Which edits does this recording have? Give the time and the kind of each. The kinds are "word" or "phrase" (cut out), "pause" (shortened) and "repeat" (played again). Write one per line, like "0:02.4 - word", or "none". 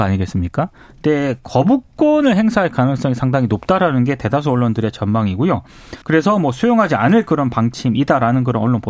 0:06.0 - pause